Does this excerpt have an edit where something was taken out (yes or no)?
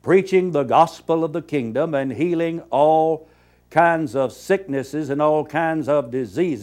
no